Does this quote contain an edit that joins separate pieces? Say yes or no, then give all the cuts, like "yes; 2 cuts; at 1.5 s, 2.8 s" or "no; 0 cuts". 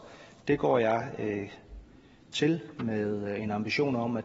no; 0 cuts